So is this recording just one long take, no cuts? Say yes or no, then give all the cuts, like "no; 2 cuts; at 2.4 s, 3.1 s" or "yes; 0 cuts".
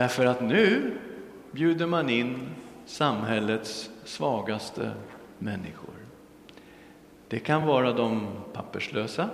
yes; 0 cuts